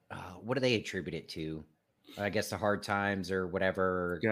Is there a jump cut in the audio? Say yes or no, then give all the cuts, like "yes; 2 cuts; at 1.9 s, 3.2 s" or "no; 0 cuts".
no; 0 cuts